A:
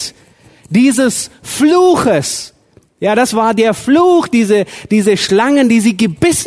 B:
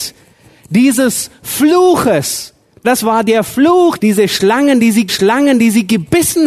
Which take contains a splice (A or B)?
B